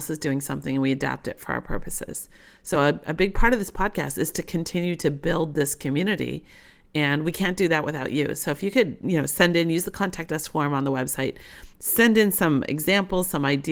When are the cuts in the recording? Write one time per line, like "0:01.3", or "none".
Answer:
none